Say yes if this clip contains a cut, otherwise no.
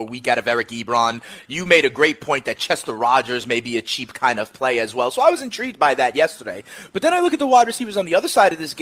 no